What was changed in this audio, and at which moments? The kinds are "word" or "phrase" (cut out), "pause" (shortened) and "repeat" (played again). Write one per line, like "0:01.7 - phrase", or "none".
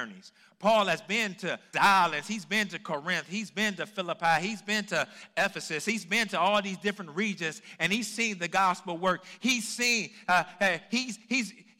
0:01.7 - phrase